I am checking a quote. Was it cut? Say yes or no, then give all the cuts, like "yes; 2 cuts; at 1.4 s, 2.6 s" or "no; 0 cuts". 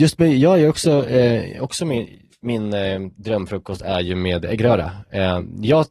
no; 0 cuts